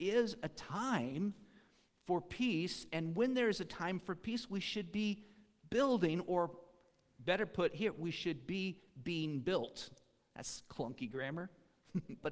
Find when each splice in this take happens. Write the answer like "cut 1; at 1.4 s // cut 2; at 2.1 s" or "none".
none